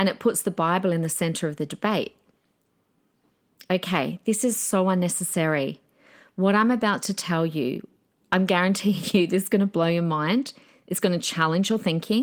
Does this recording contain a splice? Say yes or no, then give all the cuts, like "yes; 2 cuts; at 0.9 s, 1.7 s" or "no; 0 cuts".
no; 0 cuts